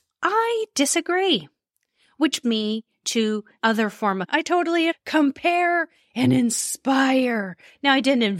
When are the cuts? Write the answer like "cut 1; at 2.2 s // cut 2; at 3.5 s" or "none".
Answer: cut 1; at 2.4 s // cut 2; at 3.6 s // cut 3; at 4.2 s // cut 4; at 4.9 s